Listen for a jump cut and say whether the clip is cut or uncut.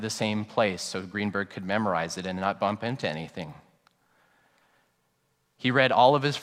uncut